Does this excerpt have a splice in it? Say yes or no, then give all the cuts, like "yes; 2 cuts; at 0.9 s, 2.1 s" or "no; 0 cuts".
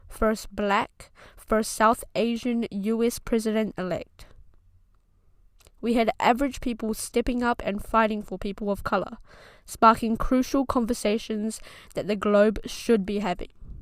no; 0 cuts